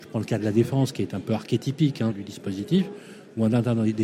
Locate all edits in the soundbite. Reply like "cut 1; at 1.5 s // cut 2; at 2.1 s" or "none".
cut 1; at 2.1 s